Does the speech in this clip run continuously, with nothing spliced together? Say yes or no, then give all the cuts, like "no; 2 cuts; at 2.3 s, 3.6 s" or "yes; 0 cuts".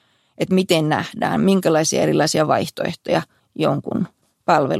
no; 1 cut; at 3.4 s